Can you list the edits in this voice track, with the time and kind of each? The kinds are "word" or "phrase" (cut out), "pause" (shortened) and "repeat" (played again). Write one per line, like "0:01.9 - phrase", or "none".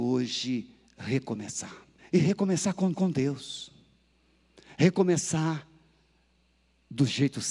0:02.0 - pause
0:02.9 - repeat